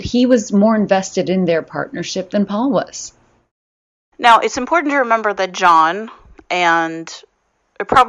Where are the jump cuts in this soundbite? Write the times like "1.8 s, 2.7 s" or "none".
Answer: none